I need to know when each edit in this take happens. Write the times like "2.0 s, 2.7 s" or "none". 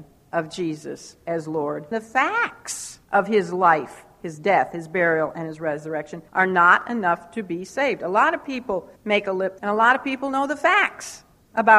1.9 s, 3.0 s, 6.3 s, 9.0 s, 9.6 s